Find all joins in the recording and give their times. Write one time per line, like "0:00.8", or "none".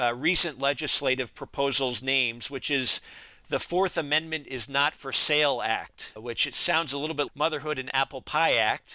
0:07.3